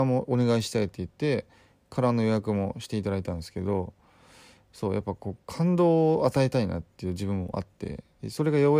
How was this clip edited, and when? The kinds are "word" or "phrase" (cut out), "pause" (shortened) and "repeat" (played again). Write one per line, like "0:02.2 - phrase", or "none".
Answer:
none